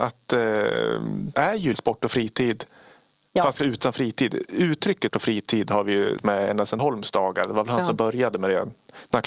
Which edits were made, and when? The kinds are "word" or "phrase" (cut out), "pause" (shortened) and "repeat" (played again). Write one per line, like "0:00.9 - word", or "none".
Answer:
0:01.3 - word
0:01.7 - word
0:03.6 - word
0:05.1 - word
0:06.2 - word
0:06.8 - word